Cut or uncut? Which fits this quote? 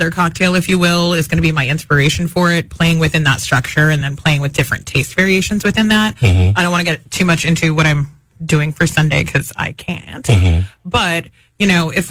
uncut